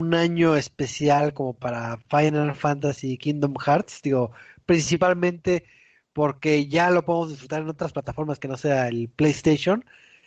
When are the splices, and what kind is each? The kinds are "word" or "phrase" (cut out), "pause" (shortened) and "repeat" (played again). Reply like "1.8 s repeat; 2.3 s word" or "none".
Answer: none